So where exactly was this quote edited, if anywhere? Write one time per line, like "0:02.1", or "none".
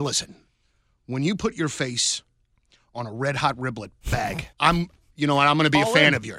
0:04.0
0:04.5